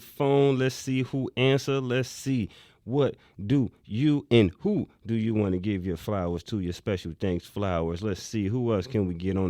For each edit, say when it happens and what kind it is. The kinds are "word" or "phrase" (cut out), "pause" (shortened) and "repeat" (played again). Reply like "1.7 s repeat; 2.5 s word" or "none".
none